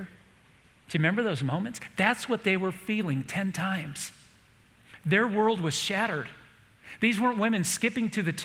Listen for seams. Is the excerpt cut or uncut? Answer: uncut